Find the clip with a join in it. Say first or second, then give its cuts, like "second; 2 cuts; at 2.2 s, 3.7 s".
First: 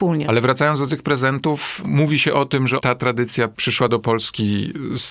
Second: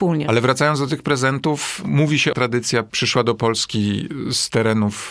second; 1 cut; at 2.3 s